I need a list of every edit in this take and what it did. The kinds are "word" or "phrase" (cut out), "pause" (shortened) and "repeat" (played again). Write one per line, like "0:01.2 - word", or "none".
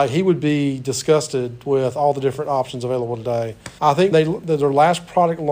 0:03.8 - word
0:04.1 - word